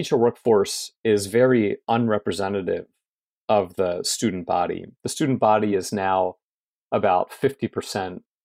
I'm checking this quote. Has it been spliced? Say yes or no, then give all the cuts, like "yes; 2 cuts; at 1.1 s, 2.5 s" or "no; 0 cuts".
no; 0 cuts